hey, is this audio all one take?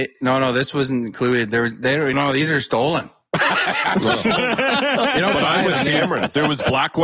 no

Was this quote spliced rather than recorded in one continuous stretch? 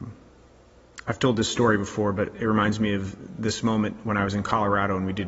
no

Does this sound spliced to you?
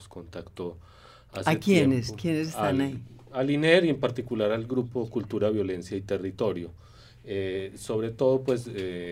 no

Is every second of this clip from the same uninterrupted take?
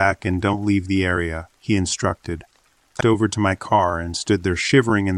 no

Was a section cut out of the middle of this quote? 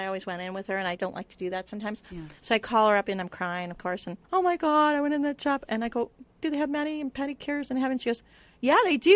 yes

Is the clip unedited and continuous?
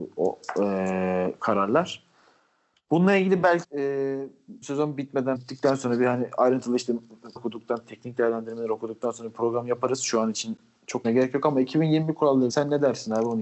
no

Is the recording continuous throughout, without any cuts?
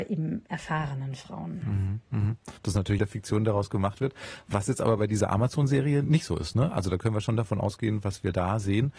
no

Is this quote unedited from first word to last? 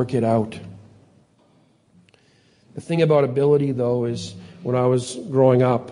yes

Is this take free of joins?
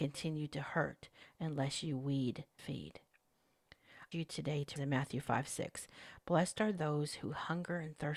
no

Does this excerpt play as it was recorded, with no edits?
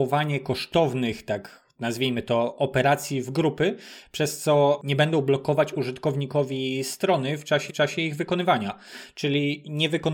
no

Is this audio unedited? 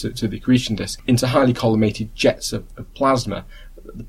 yes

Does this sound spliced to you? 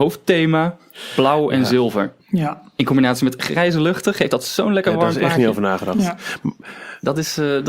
yes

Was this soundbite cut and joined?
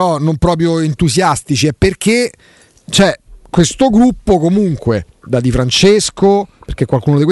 no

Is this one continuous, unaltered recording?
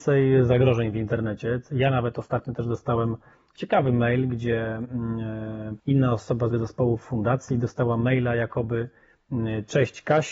no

